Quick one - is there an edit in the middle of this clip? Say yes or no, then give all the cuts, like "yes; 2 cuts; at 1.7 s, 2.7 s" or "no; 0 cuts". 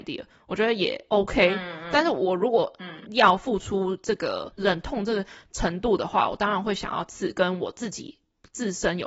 no; 0 cuts